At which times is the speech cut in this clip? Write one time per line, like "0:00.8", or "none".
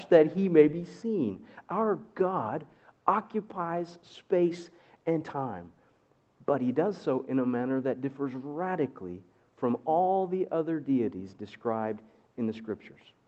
none